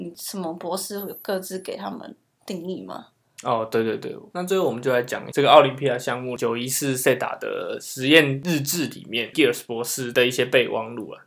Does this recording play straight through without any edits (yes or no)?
yes